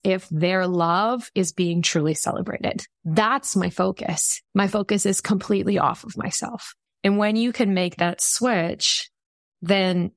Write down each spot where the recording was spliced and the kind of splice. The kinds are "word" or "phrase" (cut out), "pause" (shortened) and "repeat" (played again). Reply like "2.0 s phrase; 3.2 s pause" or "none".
2.9 s pause; 4.4 s pause; 6.9 s pause